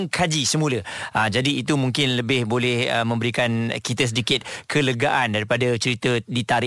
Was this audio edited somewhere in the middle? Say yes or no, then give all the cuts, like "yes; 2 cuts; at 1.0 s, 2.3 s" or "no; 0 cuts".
no; 0 cuts